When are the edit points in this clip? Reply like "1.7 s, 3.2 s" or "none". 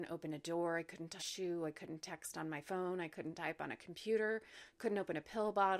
1.2 s